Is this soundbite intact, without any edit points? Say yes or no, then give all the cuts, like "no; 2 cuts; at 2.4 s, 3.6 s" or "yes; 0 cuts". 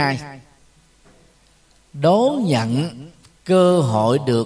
yes; 0 cuts